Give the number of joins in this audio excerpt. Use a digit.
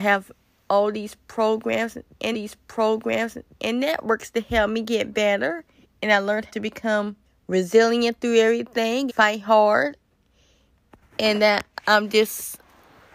5